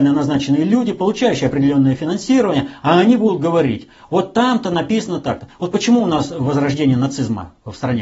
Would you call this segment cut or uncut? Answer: uncut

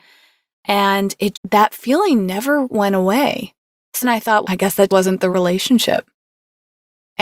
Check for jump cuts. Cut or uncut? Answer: cut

